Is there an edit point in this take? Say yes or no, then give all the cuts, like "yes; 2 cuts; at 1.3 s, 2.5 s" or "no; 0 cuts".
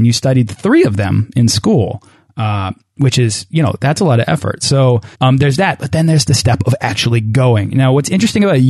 yes; 1 cut; at 5.1 s